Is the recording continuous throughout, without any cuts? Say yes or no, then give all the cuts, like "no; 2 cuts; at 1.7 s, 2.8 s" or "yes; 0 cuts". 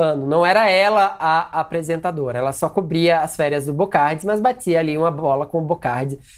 yes; 0 cuts